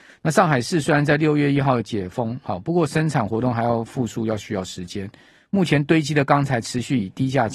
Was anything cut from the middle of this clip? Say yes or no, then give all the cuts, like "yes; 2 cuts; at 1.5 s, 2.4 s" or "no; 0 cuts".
no; 0 cuts